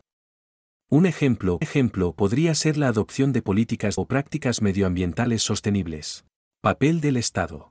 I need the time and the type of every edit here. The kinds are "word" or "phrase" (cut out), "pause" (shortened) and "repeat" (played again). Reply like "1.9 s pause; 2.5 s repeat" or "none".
1.6 s repeat; 4.0 s phrase; 6.4 s pause